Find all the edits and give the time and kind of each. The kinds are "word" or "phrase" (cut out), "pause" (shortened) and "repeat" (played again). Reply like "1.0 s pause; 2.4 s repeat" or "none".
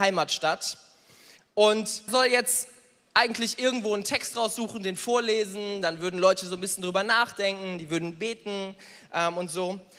2.1 s word